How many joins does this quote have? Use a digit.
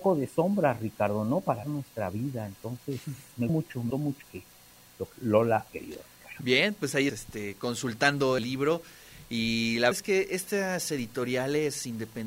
9